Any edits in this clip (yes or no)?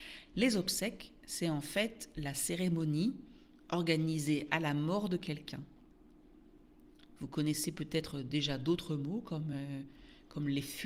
no